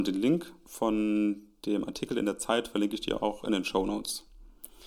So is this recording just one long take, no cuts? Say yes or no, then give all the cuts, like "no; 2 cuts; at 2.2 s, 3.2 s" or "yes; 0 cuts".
yes; 0 cuts